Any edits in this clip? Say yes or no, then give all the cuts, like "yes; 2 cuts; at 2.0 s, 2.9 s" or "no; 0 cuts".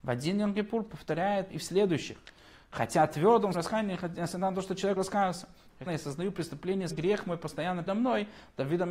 yes; 6 cuts; at 1.5 s, 3.5 s, 5.0 s, 5.9 s, 6.9 s, 7.9 s